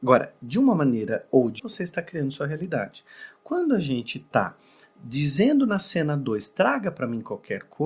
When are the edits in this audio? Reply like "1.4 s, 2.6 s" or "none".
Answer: 1.6 s